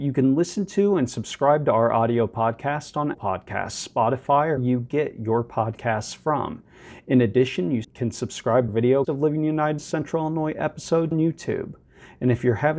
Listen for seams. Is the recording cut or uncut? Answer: cut